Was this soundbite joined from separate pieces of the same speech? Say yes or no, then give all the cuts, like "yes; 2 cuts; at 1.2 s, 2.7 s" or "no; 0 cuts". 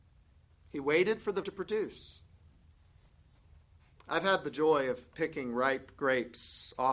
yes; 1 cut; at 1.4 s